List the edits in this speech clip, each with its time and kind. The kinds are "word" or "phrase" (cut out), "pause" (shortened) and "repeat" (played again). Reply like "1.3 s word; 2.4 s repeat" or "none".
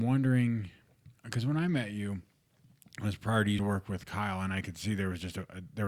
1.2 s pause; 3.6 s word